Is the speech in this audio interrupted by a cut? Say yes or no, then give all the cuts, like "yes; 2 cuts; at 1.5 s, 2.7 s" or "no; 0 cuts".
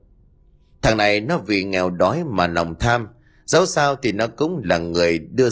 no; 0 cuts